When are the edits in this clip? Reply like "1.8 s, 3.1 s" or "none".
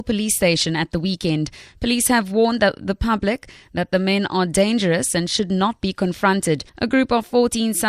6.7 s